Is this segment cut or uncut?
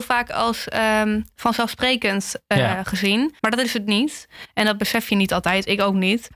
cut